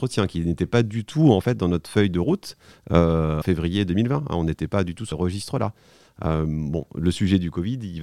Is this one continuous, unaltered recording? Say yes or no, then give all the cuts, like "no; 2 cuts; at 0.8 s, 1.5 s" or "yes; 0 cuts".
no; 2 cuts; at 3.4 s, 5.1 s